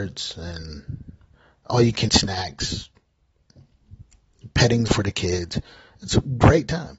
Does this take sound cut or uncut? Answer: cut